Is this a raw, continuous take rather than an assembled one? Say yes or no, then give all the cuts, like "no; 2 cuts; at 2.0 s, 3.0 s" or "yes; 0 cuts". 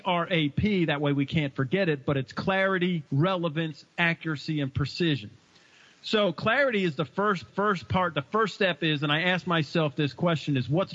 no; 2 cuts; at 3.1 s, 7.5 s